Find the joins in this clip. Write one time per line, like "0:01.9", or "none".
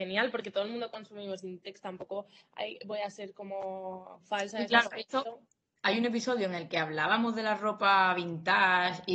none